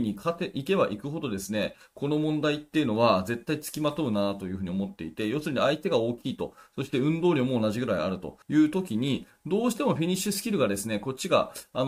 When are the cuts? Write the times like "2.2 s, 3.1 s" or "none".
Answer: 8.4 s